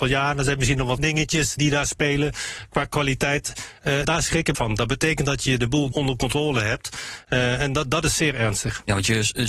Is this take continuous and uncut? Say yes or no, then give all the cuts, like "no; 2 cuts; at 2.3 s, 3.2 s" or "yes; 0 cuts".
no; 5 cuts; at 1.0 s, 1.6 s, 4.0 s, 4.5 s, 5.9 s